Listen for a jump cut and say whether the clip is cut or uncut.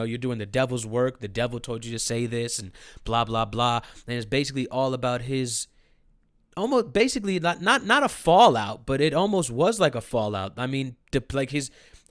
uncut